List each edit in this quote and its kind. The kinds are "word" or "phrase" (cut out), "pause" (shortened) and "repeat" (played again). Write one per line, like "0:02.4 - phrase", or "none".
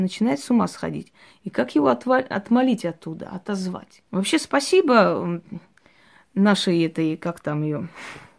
0:04.1 - pause